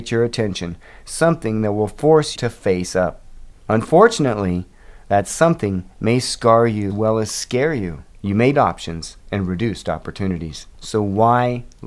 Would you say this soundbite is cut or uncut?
cut